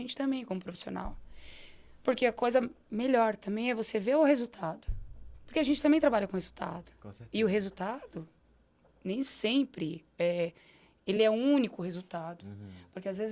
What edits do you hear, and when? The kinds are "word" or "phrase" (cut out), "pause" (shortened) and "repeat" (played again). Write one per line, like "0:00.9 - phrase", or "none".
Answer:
none